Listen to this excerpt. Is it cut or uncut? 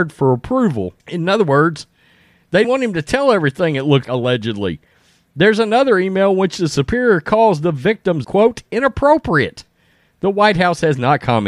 cut